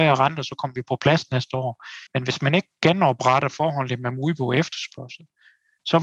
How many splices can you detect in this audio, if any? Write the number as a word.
one